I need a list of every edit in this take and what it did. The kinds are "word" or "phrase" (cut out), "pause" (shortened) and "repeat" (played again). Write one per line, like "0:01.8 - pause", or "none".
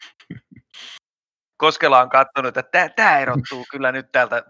none